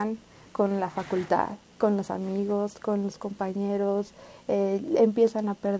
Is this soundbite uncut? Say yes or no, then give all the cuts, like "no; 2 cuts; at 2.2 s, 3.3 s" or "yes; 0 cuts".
yes; 0 cuts